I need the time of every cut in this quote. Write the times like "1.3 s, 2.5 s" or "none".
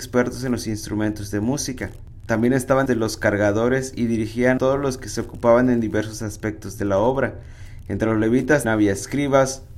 2.9 s, 4.6 s, 8.6 s